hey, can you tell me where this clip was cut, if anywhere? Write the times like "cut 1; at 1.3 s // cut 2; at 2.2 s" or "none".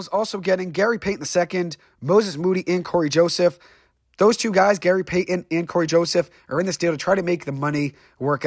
none